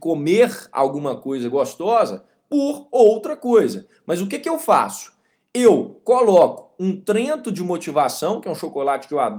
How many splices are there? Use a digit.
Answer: 0